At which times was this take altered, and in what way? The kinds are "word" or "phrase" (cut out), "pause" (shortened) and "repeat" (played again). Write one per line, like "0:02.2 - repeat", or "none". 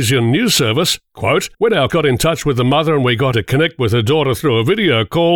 0:01.5 - pause
0:01.9 - word
0:03.3 - word